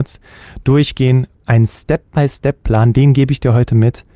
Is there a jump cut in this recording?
yes; 1 cut; at 1.3 s

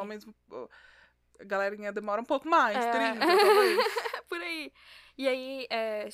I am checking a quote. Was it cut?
no; 0 cuts

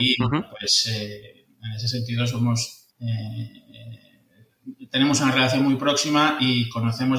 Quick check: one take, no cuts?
no; 1 cut; at 2.9 s

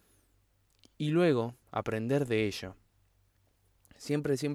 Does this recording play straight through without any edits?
yes; 0 cuts

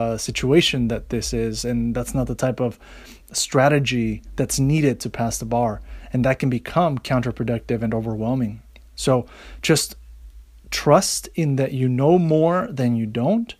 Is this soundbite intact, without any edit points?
yes; 0 cuts

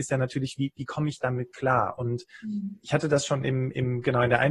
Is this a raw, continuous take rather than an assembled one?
yes; 0 cuts

